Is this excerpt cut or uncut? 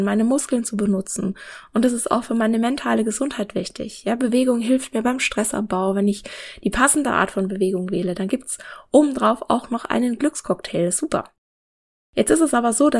uncut